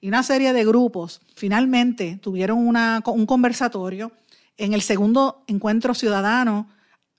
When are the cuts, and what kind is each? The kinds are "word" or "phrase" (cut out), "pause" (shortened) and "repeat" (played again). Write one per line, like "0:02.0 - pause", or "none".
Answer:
0:01.4 - word